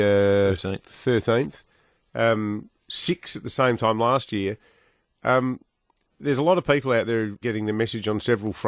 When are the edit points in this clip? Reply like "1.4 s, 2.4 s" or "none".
7.4 s